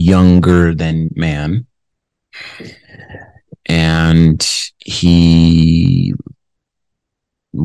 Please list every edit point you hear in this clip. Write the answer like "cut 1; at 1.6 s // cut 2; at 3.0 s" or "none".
cut 1; at 1.1 s